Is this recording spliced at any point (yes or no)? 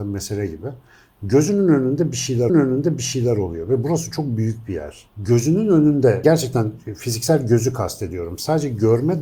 yes